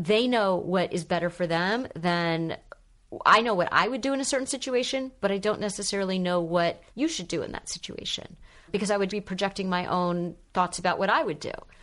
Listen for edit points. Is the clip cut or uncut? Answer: cut